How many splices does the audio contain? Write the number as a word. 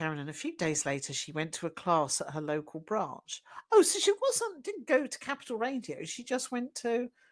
zero